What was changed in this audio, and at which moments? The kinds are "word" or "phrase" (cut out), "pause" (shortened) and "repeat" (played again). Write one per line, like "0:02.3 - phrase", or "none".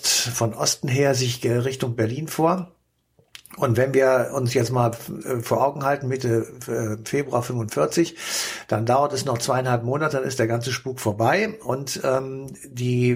none